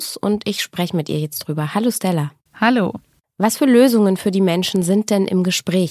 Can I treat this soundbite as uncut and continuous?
yes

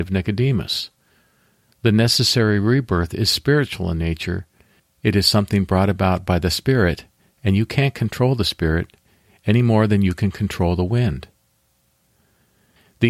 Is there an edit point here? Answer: no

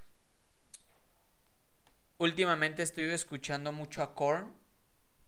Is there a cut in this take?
no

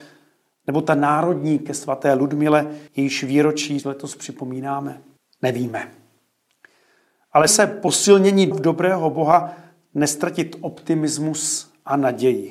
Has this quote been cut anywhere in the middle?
yes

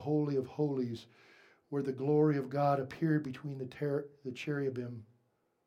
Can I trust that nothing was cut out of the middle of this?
yes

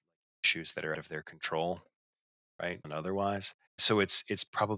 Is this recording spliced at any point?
yes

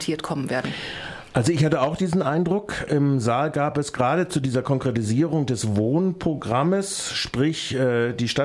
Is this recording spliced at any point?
no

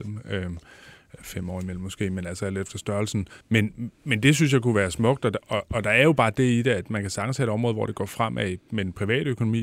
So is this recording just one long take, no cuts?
no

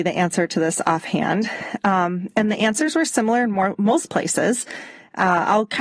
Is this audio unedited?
yes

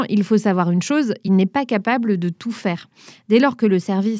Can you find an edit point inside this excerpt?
no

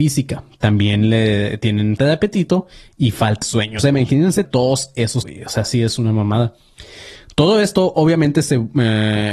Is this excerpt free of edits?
no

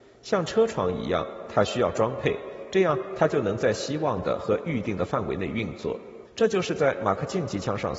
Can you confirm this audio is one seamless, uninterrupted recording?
no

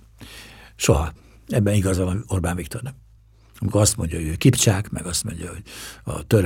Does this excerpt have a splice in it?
no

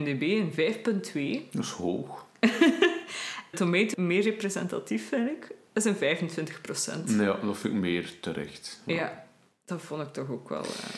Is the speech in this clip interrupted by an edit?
yes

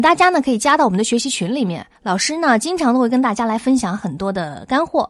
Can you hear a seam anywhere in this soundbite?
yes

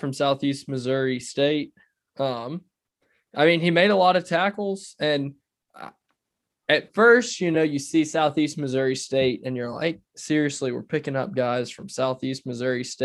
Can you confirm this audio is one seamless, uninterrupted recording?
yes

